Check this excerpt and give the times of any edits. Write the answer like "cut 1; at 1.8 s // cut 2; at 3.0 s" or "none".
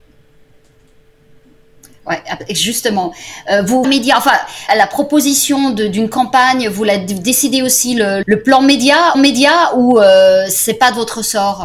cut 1; at 3.8 s // cut 2; at 4.7 s // cut 3; at 8.2 s // cut 4; at 9.1 s